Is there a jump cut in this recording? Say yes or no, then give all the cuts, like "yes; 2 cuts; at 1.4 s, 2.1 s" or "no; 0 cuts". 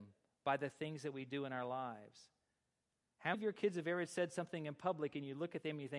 yes; 1 cut; at 3.3 s